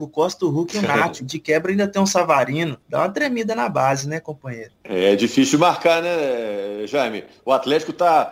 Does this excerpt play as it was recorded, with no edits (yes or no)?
no